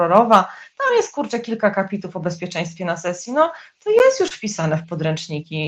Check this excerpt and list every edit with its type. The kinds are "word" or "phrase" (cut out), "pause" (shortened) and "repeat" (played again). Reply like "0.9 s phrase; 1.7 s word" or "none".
none